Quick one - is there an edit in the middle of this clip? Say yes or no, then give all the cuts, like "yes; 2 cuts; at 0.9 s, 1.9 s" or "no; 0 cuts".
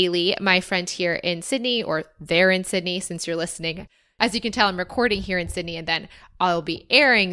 no; 0 cuts